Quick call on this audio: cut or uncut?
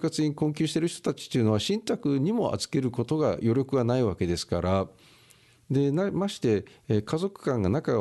uncut